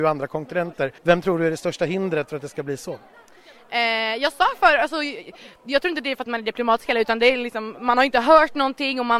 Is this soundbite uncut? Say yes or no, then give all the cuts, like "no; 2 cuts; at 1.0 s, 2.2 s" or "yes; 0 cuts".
no; 1 cut; at 1.0 s